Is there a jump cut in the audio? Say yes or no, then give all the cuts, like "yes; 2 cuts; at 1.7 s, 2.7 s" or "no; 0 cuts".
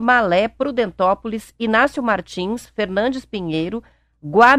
no; 0 cuts